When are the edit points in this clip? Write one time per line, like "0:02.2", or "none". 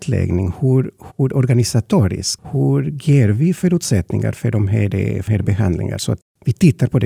0:01.1
0:05.3